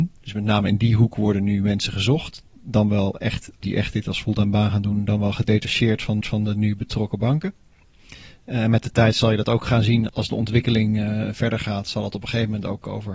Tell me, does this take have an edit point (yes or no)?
yes